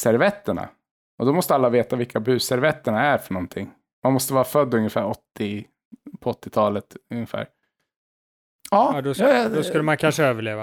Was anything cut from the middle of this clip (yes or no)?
no